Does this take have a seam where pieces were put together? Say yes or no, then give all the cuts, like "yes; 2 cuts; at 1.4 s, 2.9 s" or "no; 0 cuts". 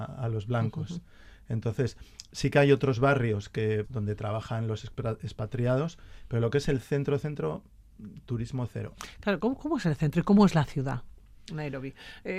yes; 1 cut; at 3.8 s